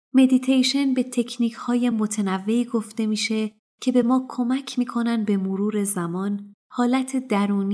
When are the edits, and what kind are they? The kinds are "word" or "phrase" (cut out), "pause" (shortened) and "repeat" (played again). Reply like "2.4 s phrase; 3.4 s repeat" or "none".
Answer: none